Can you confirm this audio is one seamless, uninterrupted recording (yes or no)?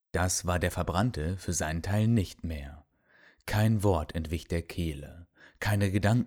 yes